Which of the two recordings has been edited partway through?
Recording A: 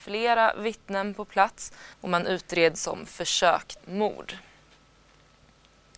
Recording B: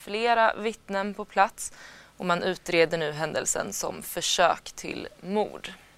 A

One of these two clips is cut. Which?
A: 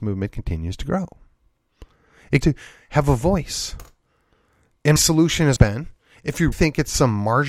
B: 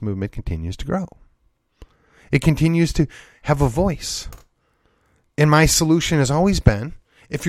A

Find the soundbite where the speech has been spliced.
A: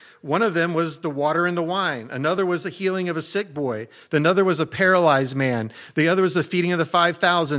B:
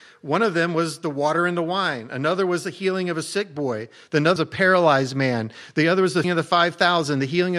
B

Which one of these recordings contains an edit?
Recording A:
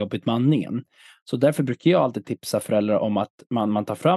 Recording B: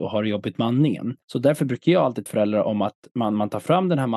B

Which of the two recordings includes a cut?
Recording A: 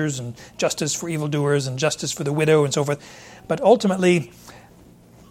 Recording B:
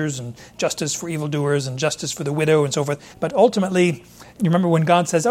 B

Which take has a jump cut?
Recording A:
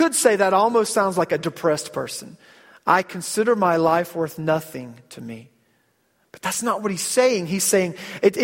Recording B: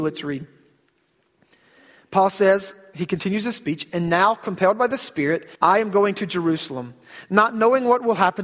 B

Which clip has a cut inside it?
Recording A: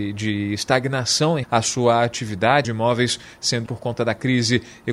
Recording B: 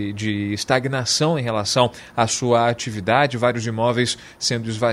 A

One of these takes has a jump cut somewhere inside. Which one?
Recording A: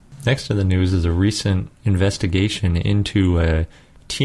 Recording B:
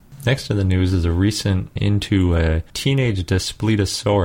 B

